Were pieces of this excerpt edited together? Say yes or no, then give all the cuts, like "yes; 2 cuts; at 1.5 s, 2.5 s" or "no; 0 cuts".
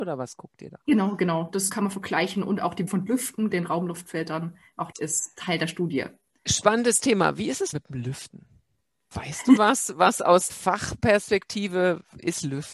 yes; 7 cuts; at 1.7 s, 2.9 s, 3.5 s, 4.9 s, 7.7 s, 9.6 s, 10.5 s